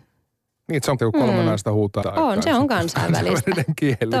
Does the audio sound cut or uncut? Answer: cut